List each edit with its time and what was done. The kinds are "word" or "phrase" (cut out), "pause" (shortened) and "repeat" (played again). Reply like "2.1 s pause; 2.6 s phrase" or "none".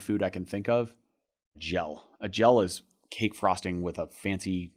1.6 s phrase